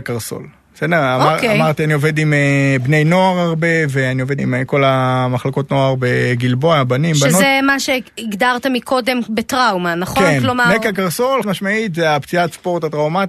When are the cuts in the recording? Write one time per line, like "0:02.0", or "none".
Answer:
0:04.4
0:11.4